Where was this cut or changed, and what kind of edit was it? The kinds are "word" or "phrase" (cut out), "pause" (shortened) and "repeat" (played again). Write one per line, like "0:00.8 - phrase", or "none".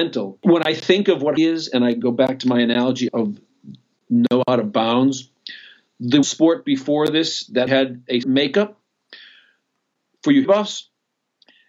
0:01.4 - word
0:03.1 - word
0:06.2 - word
0:07.7 - word
0:08.2 - word
0:10.4 - word